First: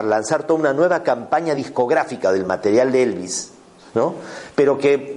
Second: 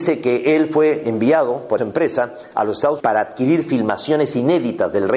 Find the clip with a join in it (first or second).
second